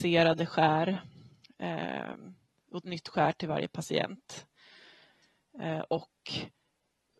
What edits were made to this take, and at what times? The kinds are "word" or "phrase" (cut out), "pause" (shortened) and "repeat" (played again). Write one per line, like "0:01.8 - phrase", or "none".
0:02.8 - word